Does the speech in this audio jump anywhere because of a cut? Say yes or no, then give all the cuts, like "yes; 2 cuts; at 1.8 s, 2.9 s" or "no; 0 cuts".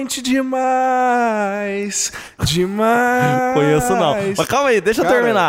no; 0 cuts